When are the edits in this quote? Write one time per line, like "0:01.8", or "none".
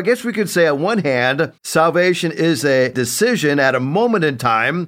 0:01.6